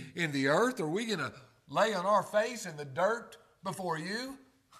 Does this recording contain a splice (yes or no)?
no